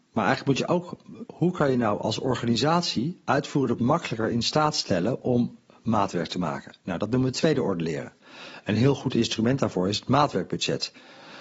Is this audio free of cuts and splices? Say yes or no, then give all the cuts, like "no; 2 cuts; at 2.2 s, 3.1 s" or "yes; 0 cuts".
no; 2 cuts; at 1.3 s, 3.8 s